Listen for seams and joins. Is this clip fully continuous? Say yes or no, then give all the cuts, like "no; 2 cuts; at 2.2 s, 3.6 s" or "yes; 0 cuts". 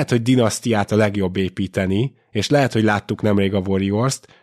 yes; 0 cuts